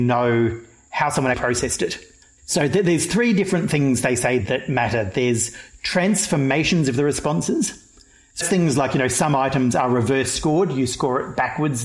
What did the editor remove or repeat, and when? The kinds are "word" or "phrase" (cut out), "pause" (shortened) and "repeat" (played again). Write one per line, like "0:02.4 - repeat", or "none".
0:01.3 - word
0:04.4 - word
0:08.4 - word